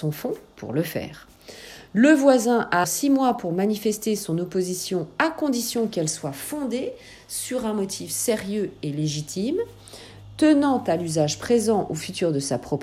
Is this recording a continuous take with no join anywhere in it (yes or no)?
no